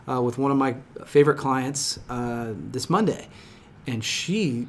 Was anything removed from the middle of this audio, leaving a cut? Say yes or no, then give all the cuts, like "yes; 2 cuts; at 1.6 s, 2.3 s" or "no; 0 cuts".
no; 0 cuts